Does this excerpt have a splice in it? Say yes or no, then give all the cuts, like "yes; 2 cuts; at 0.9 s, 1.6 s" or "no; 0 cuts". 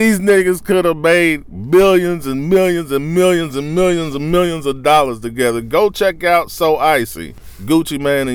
no; 0 cuts